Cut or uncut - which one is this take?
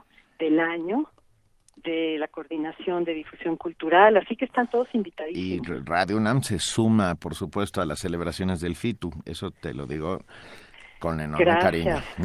uncut